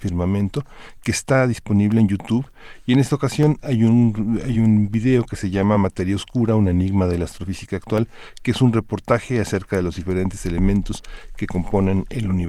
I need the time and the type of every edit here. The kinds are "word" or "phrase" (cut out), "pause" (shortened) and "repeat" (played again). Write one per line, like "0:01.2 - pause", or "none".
none